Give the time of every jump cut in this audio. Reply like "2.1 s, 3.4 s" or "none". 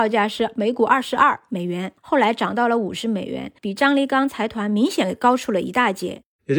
2.0 s, 3.6 s